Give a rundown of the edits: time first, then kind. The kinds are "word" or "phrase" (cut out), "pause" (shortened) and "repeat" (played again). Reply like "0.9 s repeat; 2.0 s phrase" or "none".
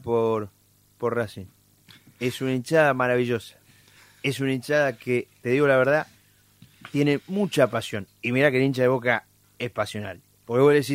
none